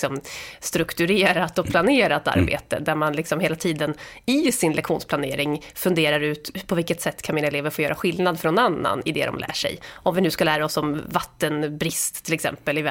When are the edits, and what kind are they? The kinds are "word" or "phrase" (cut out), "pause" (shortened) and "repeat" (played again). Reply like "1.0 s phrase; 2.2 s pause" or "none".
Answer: none